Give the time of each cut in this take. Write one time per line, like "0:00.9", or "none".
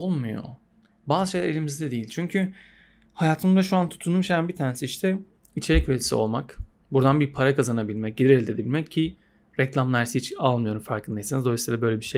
none

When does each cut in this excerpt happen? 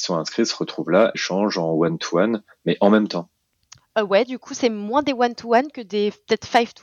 0:01.1

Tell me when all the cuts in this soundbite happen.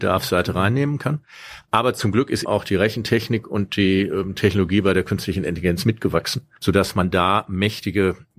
0:02.4

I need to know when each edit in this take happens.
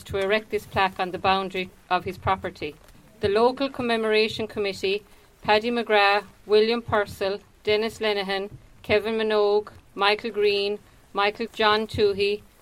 0:02.9
0:11.5

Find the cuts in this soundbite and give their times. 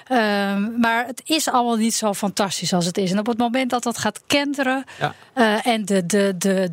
none

